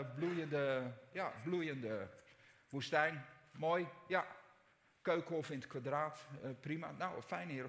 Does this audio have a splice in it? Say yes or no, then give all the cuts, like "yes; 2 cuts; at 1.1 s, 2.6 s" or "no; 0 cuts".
no; 0 cuts